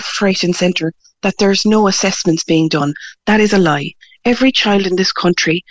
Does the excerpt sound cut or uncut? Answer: uncut